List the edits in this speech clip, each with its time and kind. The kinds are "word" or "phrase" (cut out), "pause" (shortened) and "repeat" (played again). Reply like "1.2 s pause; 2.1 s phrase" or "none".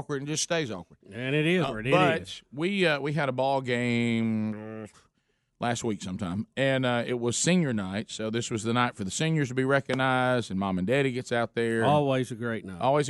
1.6 s word